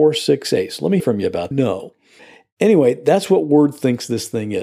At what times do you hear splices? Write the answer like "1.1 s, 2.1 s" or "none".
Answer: 1.0 s, 1.5 s